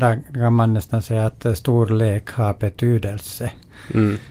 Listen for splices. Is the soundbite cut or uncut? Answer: uncut